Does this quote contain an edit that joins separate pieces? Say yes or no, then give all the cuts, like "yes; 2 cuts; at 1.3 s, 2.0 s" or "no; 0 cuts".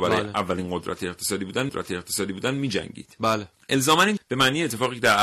yes; 3 cuts; at 1.7 s, 3.5 s, 4.2 s